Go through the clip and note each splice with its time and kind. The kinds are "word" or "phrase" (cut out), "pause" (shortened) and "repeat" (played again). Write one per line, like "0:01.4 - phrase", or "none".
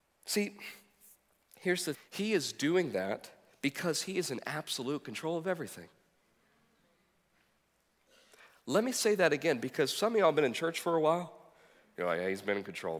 0:01.9 - word